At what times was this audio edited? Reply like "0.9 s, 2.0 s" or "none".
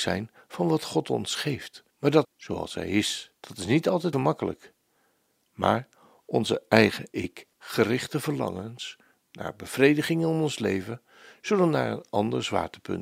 1.9 s, 2.2 s, 3.4 s, 4.1 s, 7.1 s, 7.5 s